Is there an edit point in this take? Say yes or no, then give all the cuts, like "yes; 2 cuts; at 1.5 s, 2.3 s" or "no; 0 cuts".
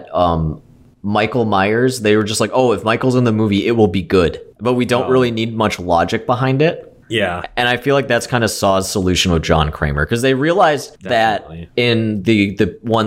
yes; 3 cuts; at 4.5 s, 7.0 s, 11.0 s